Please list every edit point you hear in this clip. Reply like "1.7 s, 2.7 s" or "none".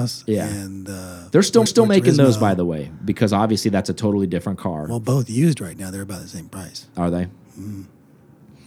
1.7 s